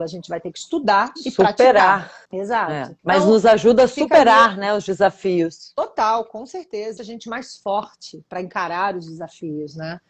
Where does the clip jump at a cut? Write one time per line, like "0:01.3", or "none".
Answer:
0:02.2
0:03.0
0:07.0